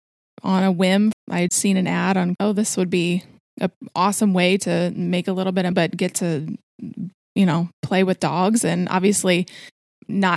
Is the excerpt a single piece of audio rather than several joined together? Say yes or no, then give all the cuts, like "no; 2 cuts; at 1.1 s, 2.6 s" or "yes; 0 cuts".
no; 4 cuts; at 1.1 s, 1.5 s, 2.4 s, 5.7 s